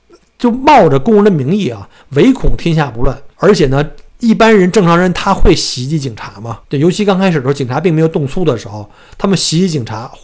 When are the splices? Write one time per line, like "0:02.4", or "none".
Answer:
0:03.3
0:04.1
0:06.6